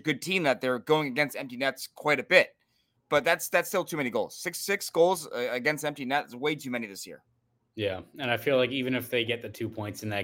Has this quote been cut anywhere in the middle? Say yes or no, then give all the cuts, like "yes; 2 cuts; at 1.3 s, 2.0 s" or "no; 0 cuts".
no; 0 cuts